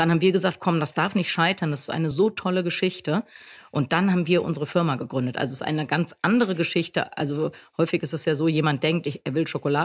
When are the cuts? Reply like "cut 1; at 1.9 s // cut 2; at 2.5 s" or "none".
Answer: none